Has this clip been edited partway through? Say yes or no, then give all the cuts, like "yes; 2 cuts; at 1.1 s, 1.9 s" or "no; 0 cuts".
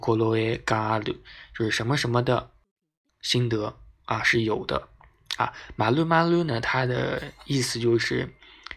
no; 0 cuts